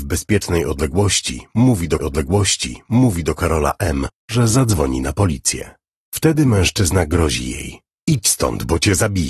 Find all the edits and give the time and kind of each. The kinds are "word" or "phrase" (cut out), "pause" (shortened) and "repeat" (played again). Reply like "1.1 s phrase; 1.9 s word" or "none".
2.0 s repeat